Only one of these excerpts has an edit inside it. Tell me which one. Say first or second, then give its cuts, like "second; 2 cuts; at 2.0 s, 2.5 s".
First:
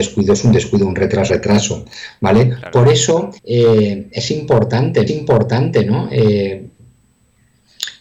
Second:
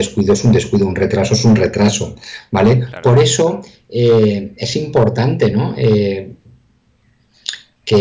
first; 3 cuts; at 1.3 s, 3.4 s, 5.1 s